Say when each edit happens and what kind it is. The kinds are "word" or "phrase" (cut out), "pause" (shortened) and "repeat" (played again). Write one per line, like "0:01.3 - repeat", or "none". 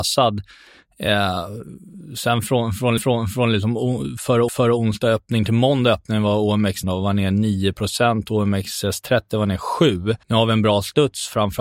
0:03.0 - repeat
0:04.5 - repeat
0:06.8 - phrase
0:10.2 - pause